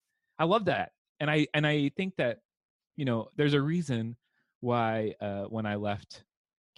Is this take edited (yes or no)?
no